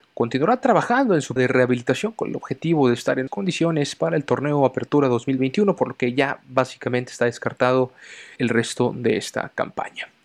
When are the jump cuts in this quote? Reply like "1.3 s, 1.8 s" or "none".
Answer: 1.4 s, 3.3 s, 8.4 s